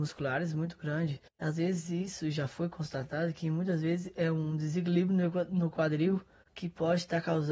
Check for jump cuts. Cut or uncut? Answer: cut